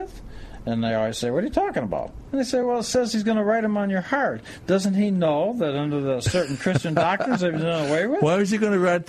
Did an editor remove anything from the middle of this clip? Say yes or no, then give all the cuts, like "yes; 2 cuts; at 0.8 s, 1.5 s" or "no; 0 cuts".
no; 0 cuts